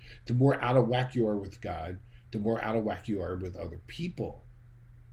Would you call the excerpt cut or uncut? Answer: uncut